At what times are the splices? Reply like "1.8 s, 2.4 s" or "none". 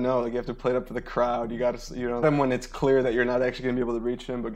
2.2 s